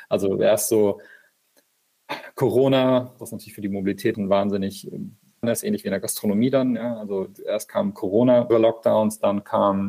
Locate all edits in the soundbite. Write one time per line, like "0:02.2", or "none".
0:03.2
0:04.1
0:05.4
0:08.5